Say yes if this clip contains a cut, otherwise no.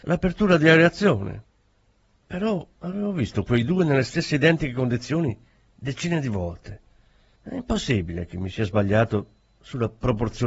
no